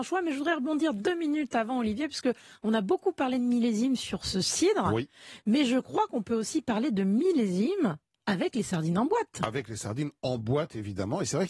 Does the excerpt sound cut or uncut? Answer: uncut